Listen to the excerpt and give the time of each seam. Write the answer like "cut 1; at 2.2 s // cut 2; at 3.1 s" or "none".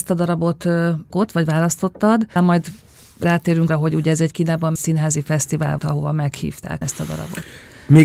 cut 1; at 1.1 s // cut 2; at 2.4 s // cut 3; at 3.7 s // cut 4; at 4.3 s // cut 5; at 4.8 s // cut 6; at 5.8 s // cut 7; at 6.8 s